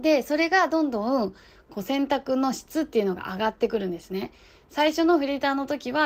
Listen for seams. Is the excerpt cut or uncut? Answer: uncut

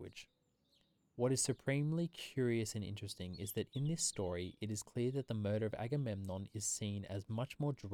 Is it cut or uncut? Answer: uncut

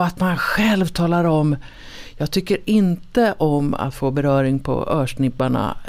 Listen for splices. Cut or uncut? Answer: uncut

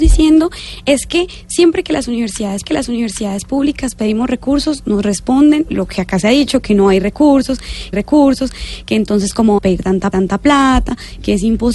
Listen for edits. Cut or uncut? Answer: cut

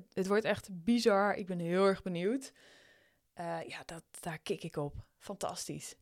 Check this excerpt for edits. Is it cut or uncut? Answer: uncut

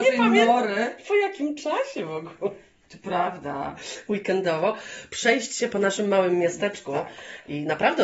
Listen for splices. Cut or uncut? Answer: uncut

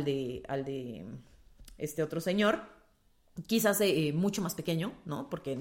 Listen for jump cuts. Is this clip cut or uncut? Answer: uncut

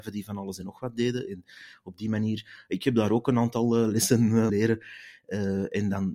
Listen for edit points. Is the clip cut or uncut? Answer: cut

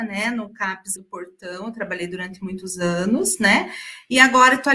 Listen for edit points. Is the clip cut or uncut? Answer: cut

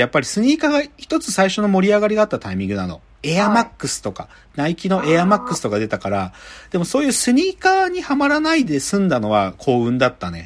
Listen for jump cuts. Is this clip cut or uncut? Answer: uncut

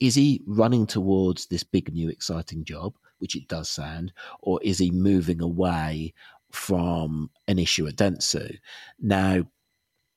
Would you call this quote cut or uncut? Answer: uncut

